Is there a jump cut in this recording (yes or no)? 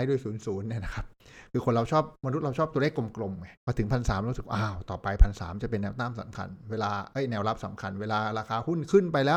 yes